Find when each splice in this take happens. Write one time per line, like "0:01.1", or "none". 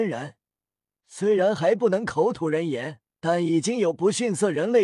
0:03.1

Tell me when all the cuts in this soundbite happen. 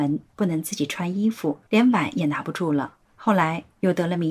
0:01.7
0:03.0

